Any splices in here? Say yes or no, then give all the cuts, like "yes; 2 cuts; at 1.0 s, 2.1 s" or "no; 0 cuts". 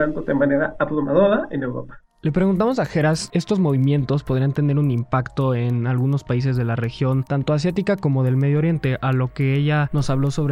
yes; 1 cut; at 3.3 s